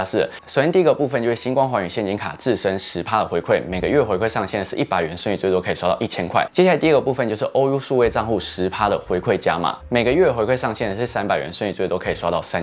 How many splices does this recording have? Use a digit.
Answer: 0